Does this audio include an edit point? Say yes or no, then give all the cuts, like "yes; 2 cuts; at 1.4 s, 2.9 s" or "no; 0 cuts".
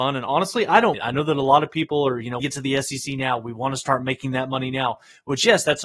yes; 2 cuts; at 0.9 s, 2.4 s